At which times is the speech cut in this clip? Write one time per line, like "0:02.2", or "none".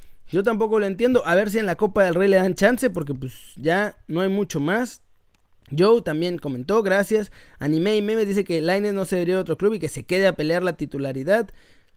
none